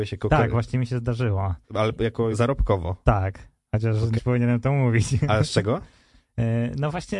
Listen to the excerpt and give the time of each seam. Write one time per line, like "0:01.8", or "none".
0:01.6
0:02.3
0:04.2